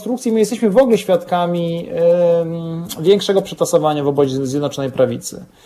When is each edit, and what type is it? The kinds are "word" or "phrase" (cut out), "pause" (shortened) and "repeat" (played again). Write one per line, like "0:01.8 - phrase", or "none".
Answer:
none